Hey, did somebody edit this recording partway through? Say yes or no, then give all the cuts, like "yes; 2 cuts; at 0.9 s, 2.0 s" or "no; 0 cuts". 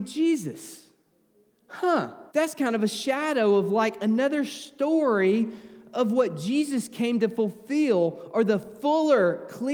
yes; 1 cut; at 2.3 s